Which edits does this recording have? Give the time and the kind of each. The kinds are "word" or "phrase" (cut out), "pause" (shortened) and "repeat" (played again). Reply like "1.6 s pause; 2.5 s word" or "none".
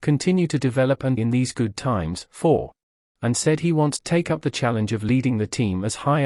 1.2 s word; 3.2 s word; 4.0 s word